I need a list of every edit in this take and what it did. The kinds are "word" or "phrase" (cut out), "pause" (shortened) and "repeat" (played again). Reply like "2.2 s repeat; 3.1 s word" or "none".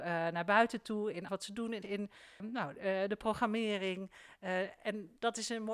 1.3 s word; 1.8 s word; 2.4 s word